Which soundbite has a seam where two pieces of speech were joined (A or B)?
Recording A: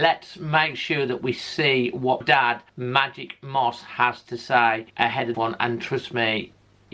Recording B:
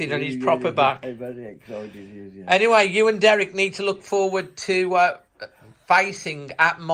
A